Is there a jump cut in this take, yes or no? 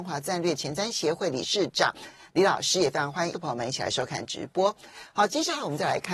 yes